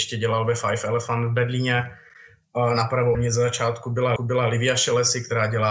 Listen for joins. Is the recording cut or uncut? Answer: cut